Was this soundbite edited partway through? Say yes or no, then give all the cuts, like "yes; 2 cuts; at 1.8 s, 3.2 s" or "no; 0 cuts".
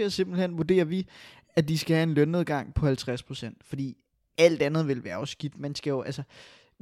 no; 0 cuts